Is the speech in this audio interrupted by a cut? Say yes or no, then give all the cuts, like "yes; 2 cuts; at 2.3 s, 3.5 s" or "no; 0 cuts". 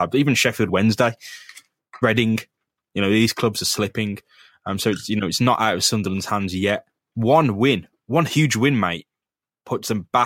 no; 0 cuts